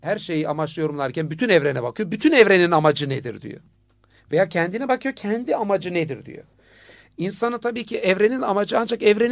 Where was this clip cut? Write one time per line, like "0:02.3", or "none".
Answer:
none